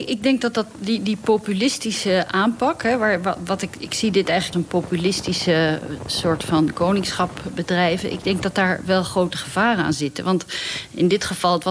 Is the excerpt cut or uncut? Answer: cut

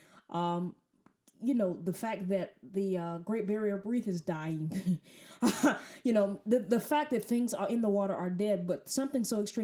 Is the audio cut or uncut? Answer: uncut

